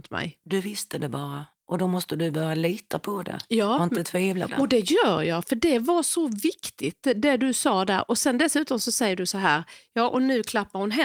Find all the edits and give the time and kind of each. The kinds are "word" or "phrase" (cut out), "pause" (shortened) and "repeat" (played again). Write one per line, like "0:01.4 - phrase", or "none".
0:04.5 - word

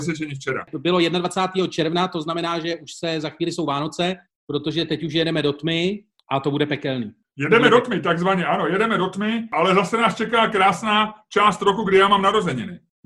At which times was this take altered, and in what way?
none

